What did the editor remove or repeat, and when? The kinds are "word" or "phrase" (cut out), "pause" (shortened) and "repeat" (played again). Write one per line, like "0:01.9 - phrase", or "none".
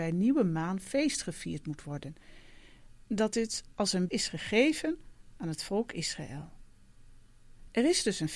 0:04.1 - word

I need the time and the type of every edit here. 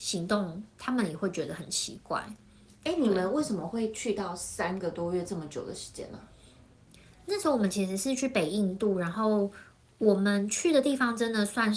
none

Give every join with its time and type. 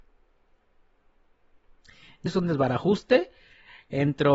0:02.3 - word

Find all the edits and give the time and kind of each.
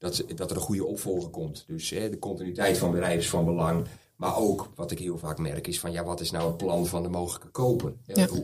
none

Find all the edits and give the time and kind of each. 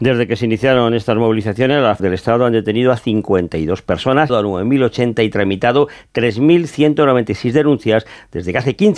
0:02.0 - phrase
0:04.3 - word

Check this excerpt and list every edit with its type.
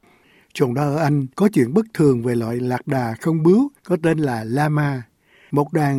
0:01.3 - pause
0:03.8 - pause

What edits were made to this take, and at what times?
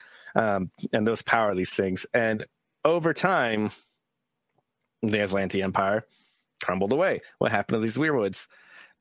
none

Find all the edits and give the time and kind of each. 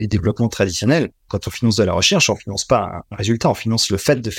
0:01.2 - pause

